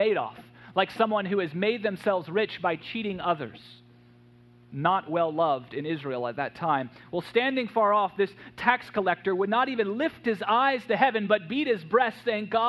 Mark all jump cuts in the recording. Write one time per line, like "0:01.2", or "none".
none